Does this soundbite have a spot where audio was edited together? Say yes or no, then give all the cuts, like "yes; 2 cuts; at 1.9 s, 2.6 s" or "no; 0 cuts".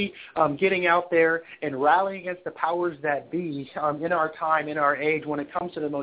no; 0 cuts